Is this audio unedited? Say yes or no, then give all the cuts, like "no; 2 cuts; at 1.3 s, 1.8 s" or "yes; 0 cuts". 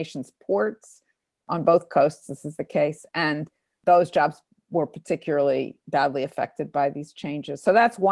yes; 0 cuts